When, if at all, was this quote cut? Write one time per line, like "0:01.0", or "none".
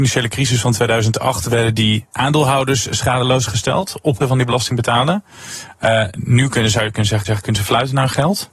0:04.2
0:07.2